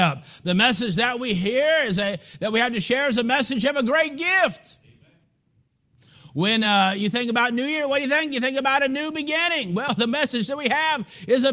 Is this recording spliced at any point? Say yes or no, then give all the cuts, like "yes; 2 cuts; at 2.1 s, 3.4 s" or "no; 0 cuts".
no; 0 cuts